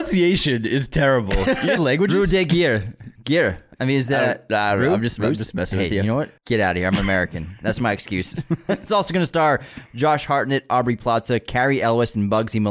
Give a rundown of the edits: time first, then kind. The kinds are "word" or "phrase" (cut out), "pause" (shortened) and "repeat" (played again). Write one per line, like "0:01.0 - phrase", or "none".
0:01.8 - phrase
0:06.4 - pause